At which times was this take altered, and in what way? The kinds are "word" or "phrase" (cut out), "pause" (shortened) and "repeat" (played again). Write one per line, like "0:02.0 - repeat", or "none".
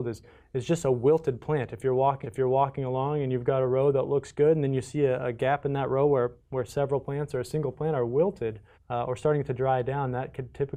0:02.2 - repeat
0:08.7 - pause